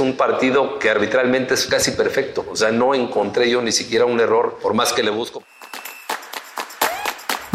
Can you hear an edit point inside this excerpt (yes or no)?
no